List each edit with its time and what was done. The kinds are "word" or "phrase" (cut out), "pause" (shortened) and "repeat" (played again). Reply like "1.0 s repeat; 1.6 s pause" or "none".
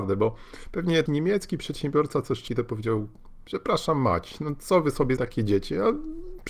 1.1 s word; 2.5 s word; 5.2 s word